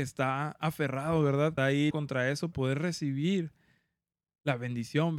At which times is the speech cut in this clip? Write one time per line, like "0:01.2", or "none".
0:01.6
0:01.9
0:02.5